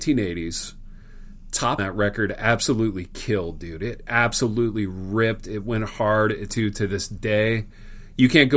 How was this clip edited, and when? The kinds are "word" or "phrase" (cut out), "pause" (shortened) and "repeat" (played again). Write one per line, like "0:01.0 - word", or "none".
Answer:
0:01.8 - phrase
0:06.5 - word